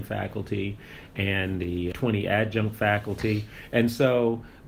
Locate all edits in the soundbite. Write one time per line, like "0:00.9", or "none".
0:01.9

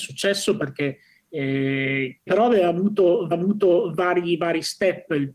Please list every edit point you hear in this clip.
0:02.3
0:03.3

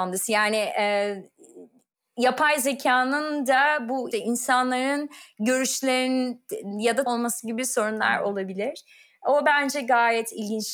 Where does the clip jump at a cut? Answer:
0:04.1
0:07.1

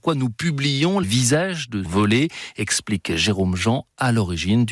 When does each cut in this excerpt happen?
0:01.0
0:01.8

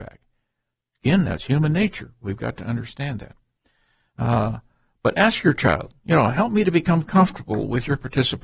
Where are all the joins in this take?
none

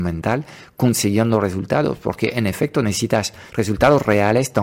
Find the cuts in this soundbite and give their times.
0:03.5

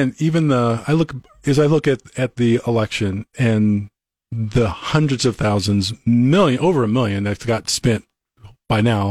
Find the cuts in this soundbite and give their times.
none

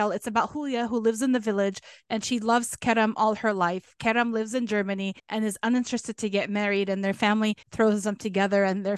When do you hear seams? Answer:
0:05.2
0:07.6

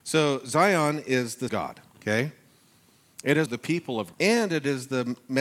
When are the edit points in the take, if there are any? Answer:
0:01.5
0:01.9
0:03.5
0:04.1

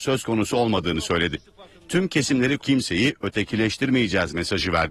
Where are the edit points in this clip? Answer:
0:02.6

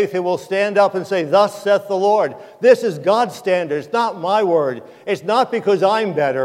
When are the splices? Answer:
none

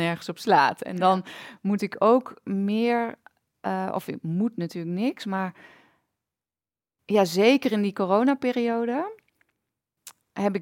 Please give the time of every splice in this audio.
none

